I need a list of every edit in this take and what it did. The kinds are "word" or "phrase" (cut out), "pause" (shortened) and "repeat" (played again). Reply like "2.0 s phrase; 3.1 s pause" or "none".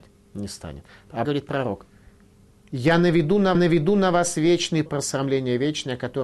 1.2 s word; 3.5 s repeat; 4.9 s word